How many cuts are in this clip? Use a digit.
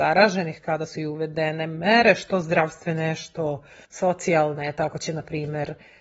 1